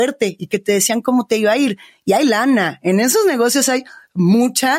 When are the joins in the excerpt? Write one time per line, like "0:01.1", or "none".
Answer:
none